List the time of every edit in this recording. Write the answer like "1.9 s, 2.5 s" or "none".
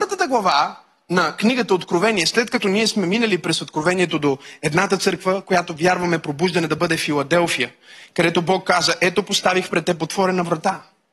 none